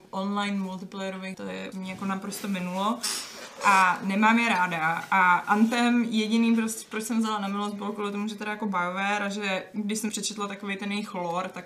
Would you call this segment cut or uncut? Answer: cut